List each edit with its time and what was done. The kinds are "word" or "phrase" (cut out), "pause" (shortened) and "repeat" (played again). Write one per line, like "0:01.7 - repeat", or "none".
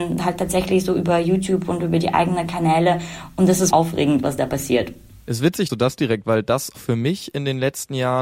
0:03.7 - word
0:05.7 - word
0:06.2 - word
0:06.7 - word